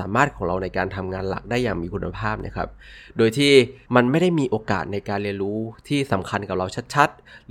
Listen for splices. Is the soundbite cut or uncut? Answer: cut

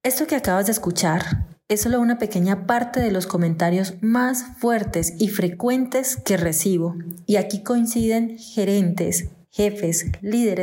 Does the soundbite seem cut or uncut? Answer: uncut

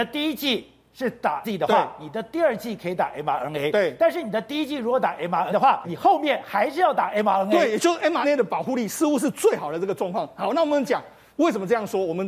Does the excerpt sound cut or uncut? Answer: cut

